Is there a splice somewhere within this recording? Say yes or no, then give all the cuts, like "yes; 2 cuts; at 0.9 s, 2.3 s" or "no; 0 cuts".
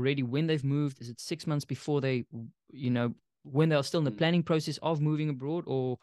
no; 0 cuts